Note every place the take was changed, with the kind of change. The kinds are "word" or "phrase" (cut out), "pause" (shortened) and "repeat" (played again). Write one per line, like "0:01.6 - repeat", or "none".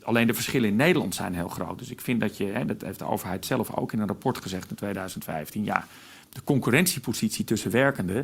none

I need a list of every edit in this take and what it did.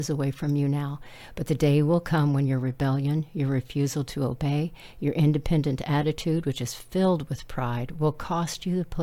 none

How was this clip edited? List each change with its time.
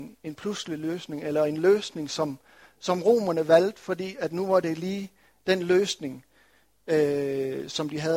none

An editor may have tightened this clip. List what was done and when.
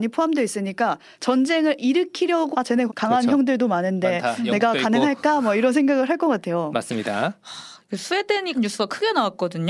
0:02.5 - word
0:02.9 - word
0:08.5 - word

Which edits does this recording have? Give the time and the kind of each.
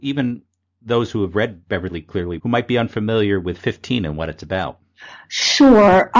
0:02.4 - word

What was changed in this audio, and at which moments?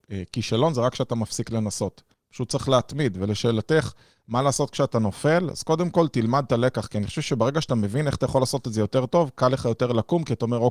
0:02.1 - pause

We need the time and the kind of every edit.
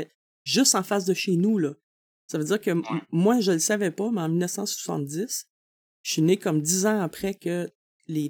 none

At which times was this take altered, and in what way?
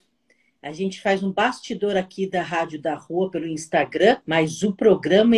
0:04.2 - pause

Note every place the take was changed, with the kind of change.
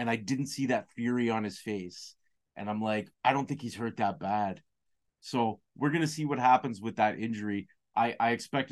0:03.1 - pause

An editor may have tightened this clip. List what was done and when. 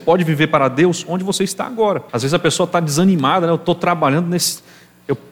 0:02.1 - pause

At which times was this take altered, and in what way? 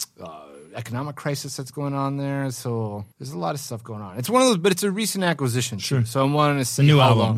0:03.1 - pause

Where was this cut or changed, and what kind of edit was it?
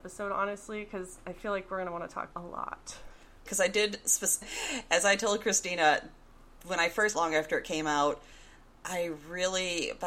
0:02.3 - phrase
0:03.5 - word
0:04.4 - word
0:07.1 - phrase

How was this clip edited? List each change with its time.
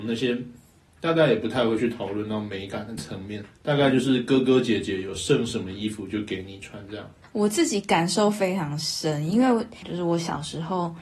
0:03.5 - pause

